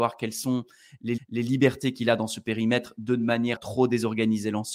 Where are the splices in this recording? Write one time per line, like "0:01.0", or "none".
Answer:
0:01.2
0:03.6